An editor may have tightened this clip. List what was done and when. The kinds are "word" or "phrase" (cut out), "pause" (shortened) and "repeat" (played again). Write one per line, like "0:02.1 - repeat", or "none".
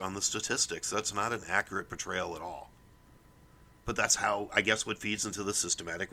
none